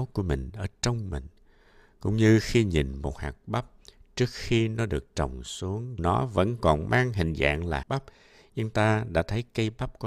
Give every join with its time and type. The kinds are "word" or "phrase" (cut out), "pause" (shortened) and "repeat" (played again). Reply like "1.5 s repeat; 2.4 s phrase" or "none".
6.0 s word; 7.8 s word